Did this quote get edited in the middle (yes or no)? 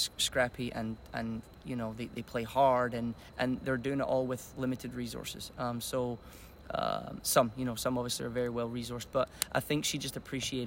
no